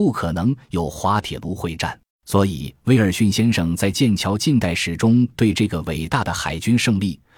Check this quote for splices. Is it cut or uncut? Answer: cut